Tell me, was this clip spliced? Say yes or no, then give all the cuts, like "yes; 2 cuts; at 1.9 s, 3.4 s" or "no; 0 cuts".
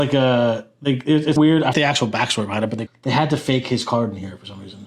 yes; 3 cuts; at 1.4 s, 1.7 s, 2.9 s